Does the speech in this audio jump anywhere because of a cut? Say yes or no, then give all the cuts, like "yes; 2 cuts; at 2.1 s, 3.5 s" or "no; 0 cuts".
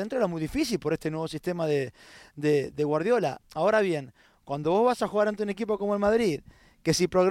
no; 0 cuts